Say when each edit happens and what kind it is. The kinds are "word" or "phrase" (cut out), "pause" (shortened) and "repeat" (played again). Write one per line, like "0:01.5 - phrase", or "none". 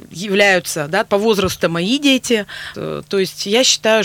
0:01.1 - word
0:01.6 - phrase
0:02.7 - word